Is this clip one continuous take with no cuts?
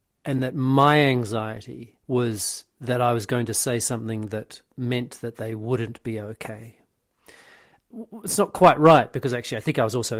no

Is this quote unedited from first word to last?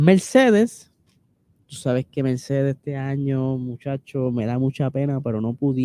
yes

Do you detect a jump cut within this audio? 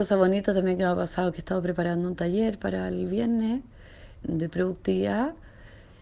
yes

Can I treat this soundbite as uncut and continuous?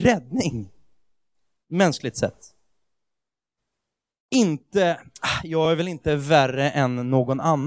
yes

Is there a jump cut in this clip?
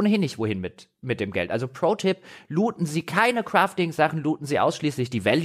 no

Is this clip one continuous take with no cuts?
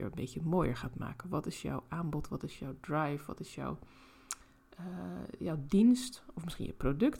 yes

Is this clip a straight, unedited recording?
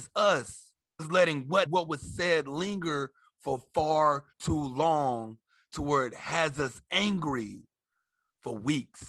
no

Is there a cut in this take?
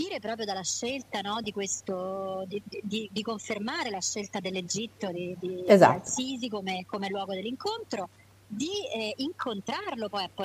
no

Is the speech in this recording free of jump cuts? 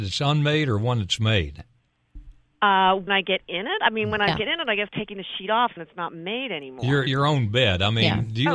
no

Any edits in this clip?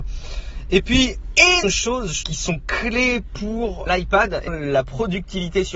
yes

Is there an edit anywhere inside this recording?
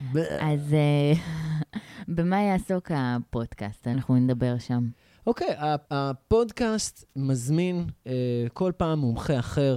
yes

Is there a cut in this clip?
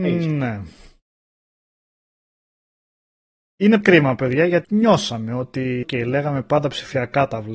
yes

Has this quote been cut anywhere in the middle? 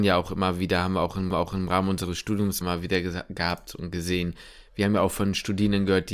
yes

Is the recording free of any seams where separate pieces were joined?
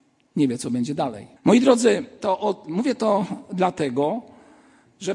no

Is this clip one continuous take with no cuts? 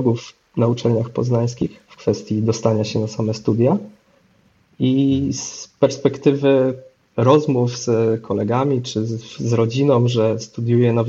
yes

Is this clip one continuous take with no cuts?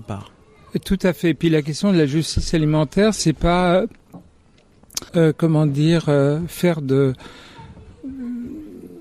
no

